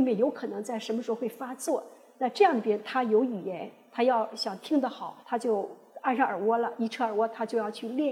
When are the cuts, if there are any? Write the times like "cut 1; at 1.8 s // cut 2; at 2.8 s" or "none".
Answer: cut 1; at 5.2 s